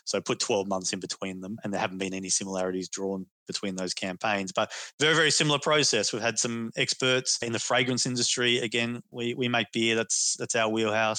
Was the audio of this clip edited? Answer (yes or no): no